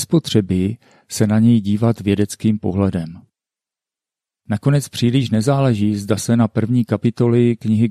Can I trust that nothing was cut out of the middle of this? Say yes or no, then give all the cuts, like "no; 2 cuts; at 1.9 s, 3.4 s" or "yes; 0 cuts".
yes; 0 cuts